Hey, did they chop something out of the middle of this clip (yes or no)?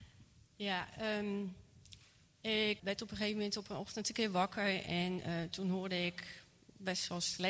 yes